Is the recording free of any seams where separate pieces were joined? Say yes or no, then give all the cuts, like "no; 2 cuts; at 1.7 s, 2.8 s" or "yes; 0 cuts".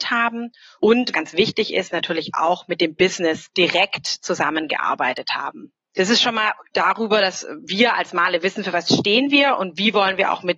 no; 1 cut; at 1.1 s